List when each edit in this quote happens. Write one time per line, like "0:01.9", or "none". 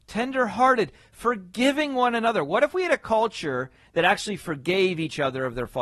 none

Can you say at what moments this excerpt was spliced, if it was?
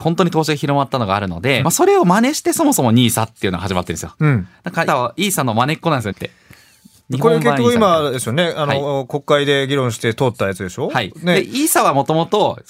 0:01.6
0:04.9
0:06.1

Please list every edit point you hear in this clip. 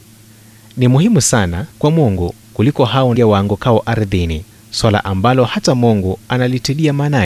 0:01.7
0:02.4
0:03.2
0:04.5

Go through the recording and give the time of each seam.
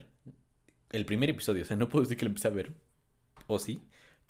none

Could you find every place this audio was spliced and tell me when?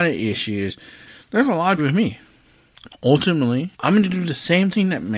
0:01.8
0:03.7

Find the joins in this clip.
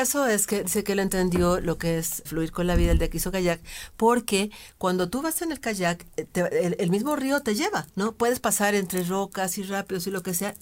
0:02.3
0:07.9

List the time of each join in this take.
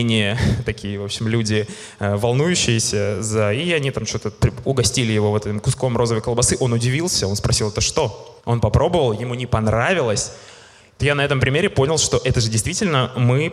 0:08.4
0:11.0

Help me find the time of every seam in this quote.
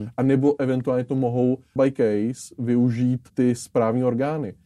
0:01.8
0:03.3

